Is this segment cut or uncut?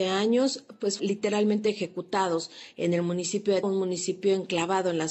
cut